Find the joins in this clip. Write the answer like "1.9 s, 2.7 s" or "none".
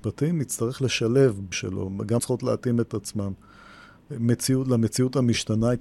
1.5 s, 2.2 s